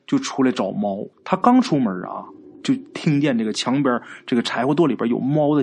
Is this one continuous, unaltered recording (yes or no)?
no